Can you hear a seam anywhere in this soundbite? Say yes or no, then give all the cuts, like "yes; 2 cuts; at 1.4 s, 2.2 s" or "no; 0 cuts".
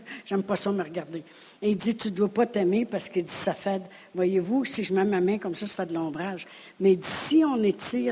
no; 0 cuts